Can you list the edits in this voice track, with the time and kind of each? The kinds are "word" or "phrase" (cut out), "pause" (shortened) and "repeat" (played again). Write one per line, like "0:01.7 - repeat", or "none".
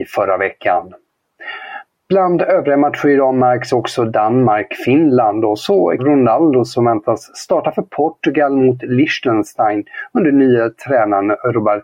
0:06.0 - word